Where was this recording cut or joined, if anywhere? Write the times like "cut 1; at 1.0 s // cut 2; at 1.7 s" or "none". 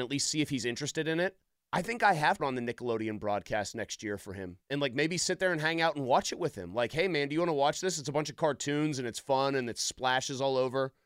cut 1; at 1.6 s // cut 2; at 2.4 s // cut 3; at 4.6 s